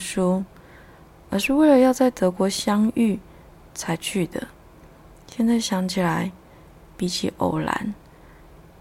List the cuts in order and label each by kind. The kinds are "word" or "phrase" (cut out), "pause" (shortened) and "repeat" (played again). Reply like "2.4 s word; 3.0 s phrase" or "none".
none